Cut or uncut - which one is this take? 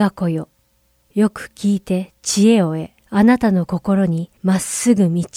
cut